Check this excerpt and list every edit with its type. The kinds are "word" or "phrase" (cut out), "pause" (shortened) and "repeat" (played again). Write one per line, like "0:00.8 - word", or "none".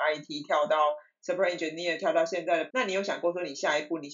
0:02.7 - word